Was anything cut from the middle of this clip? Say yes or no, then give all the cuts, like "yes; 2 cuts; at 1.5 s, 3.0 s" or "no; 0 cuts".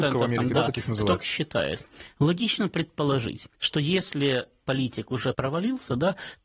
yes; 4 cuts; at 1.2 s, 3.5 s, 4.6 s, 5.3 s